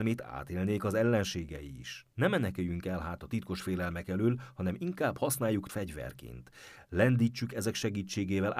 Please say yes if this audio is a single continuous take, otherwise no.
no